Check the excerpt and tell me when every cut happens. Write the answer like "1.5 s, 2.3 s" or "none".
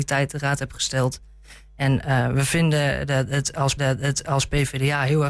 3.8 s